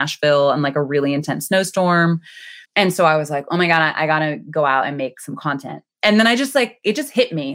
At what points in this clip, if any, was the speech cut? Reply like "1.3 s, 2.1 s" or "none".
2.7 s